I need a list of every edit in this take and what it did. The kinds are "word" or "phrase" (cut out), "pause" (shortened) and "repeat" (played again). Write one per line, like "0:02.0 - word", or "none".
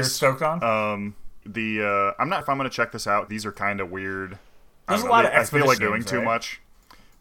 0:01.4 - word
0:02.4 - word
0:03.3 - word
0:05.8 - word